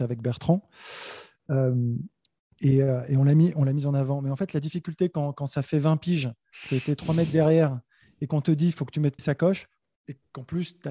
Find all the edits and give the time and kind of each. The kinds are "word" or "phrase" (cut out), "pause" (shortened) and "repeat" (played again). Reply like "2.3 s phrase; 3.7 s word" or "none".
9.2 s word